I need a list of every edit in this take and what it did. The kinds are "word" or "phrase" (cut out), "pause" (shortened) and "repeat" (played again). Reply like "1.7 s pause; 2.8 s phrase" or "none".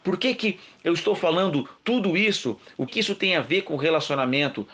1.8 s pause; 2.9 s word